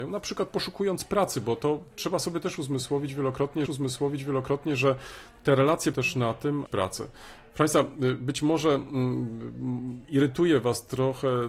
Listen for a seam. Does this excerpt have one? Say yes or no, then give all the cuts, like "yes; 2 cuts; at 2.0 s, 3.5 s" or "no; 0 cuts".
yes; 3 cuts; at 3.7 s, 5.9 s, 6.7 s